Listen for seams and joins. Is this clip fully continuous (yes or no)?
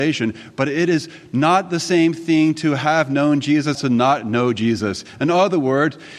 no